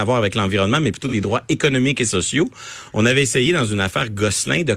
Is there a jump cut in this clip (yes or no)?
no